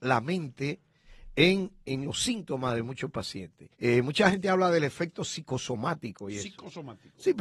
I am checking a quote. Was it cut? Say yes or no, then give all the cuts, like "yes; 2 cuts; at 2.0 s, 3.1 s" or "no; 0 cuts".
yes; 1 cut; at 3.7 s